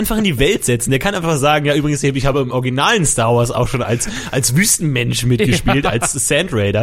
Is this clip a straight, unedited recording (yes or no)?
yes